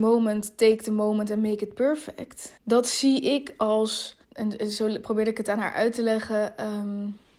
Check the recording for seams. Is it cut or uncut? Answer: cut